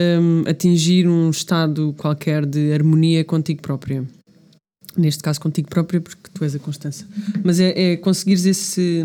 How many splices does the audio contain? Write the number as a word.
zero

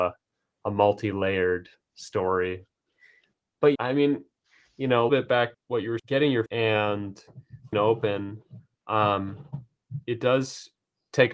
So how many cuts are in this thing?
six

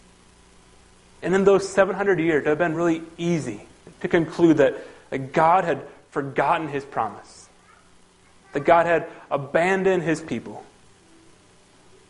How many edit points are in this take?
zero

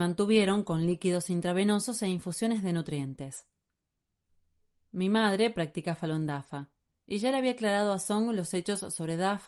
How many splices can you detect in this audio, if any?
zero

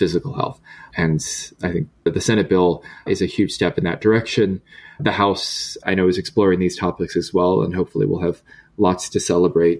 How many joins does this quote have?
zero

